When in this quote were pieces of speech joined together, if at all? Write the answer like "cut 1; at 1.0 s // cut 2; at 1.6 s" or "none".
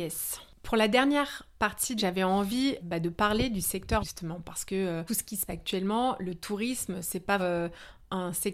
cut 1; at 2.0 s // cut 2; at 2.8 s // cut 3; at 4.0 s // cut 4; at 5.1 s // cut 5; at 5.5 s // cut 6; at 7.4 s